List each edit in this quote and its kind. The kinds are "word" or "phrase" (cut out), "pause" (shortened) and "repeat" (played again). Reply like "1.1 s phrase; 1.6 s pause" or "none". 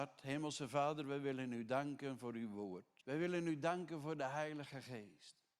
3.0 s pause